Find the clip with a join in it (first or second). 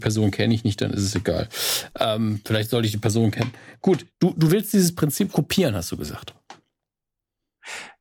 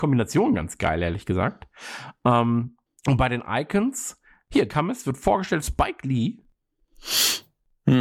second